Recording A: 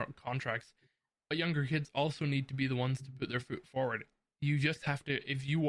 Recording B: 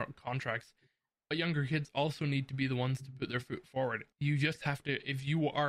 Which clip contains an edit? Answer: B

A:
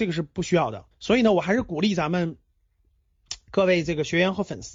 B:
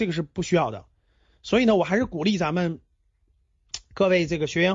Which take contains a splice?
A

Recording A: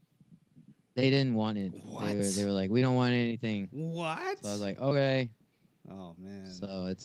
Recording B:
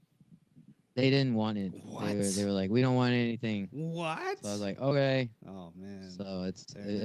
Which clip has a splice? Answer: B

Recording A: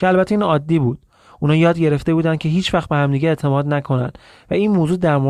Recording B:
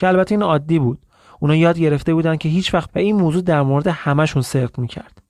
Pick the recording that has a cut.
B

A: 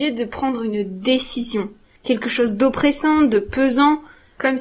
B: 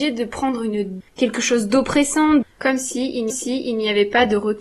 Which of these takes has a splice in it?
B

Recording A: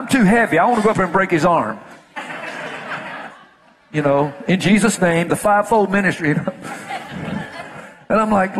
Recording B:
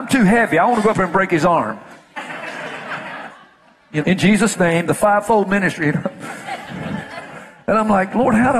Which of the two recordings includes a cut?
B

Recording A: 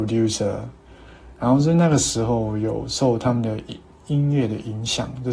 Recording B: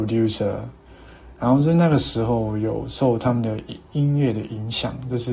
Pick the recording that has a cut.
B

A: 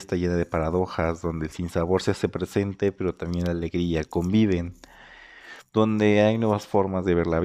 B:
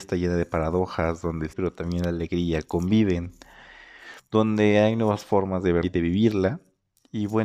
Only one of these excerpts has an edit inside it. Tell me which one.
B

